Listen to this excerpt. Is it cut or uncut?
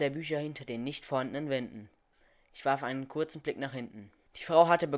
uncut